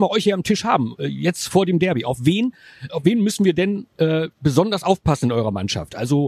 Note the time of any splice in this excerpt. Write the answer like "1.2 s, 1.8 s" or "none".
2.9 s

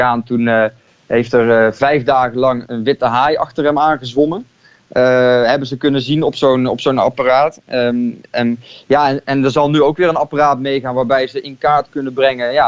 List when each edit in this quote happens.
2.7 s

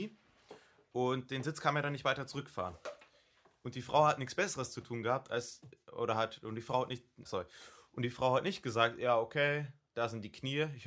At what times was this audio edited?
7.2 s

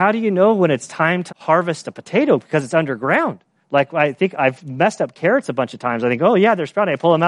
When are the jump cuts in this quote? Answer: 1.3 s, 3.5 s

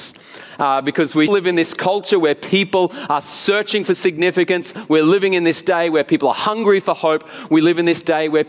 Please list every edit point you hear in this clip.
1.3 s

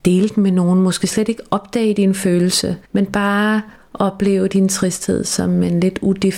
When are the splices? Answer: 2.8 s

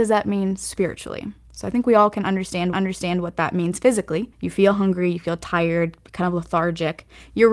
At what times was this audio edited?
2.7 s, 4.3 s

